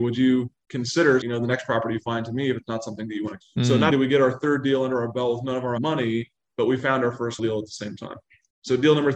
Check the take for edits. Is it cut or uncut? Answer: cut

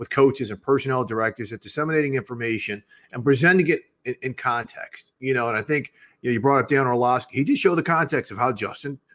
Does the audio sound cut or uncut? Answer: uncut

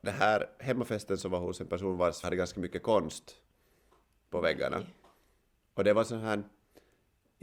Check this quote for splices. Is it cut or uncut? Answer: cut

